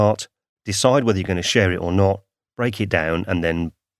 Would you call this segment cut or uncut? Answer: uncut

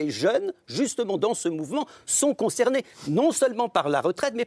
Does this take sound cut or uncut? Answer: uncut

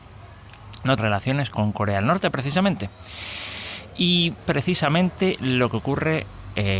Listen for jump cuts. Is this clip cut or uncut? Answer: cut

